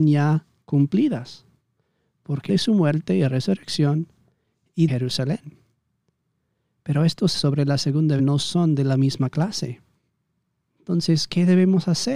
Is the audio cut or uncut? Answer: cut